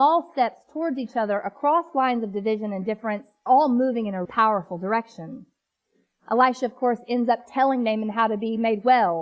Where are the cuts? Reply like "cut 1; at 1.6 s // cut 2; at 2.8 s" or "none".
cut 1; at 3.5 s // cut 2; at 4.2 s